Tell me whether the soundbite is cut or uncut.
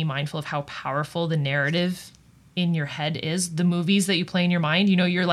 uncut